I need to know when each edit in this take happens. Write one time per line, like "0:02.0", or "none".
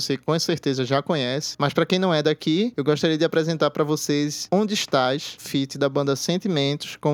0:05.4